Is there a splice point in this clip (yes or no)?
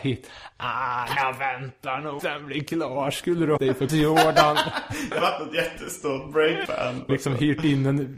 yes